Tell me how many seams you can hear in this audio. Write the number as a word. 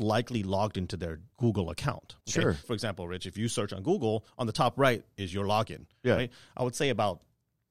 four